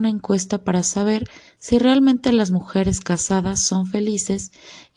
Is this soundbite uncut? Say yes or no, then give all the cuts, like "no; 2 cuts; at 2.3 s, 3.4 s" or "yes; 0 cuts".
yes; 0 cuts